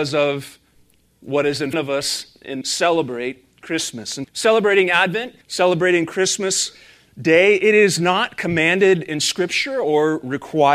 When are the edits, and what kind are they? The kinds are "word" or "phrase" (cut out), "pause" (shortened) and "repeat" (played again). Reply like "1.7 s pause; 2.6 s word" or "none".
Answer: 1.7 s word; 2.6 s phrase; 4.2 s word; 5.4 s pause